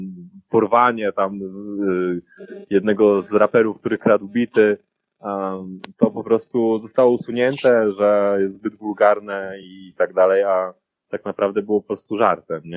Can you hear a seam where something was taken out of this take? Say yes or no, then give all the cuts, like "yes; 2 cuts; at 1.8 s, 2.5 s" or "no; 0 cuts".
no; 0 cuts